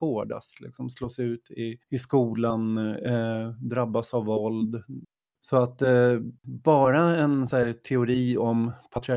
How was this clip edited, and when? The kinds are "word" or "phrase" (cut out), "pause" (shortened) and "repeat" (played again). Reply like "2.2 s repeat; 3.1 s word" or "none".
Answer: 1.8 s pause; 5.2 s pause; 6.4 s pause